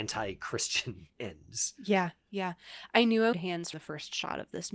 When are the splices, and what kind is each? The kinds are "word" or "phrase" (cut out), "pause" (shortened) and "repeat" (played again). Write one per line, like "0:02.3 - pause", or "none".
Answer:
0:01.1 - pause
0:03.3 - phrase
0:03.7 - word